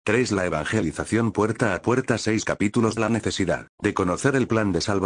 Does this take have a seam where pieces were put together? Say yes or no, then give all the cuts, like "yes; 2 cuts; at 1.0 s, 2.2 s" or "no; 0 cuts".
yes; 2 cuts; at 3.0 s, 3.7 s